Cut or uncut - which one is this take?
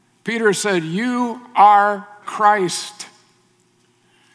cut